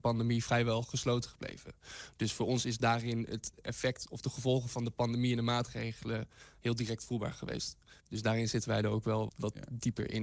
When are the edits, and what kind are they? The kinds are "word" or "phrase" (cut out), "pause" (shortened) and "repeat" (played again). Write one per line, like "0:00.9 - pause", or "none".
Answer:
0:08.0 - pause
0:09.3 - word